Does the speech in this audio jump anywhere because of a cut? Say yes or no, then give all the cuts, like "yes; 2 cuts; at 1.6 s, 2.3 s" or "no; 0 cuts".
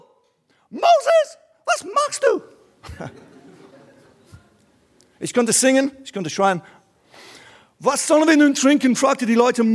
no; 0 cuts